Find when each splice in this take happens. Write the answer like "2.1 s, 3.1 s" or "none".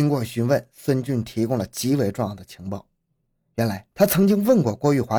3.9 s